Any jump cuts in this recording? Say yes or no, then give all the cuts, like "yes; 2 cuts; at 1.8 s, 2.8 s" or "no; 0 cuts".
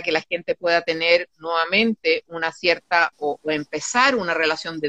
no; 0 cuts